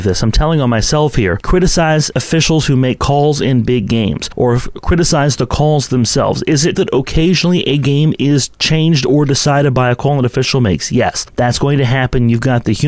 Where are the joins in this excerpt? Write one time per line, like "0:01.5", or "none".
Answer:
0:06.7